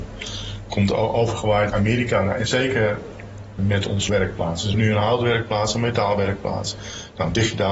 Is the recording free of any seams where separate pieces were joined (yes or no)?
no